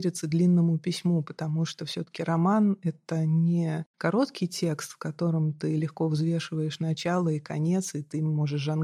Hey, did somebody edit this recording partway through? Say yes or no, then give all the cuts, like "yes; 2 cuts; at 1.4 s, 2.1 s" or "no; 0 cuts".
no; 0 cuts